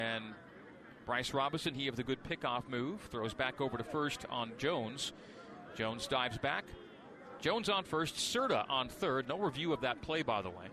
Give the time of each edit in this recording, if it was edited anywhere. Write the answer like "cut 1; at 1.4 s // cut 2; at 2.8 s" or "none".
none